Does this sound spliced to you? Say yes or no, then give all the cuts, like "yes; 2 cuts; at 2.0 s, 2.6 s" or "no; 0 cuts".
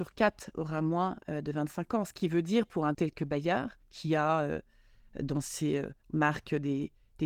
yes; 3 cuts; at 2.9 s, 3.8 s, 6.0 s